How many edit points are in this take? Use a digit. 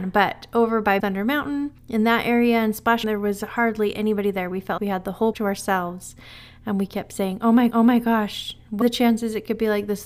7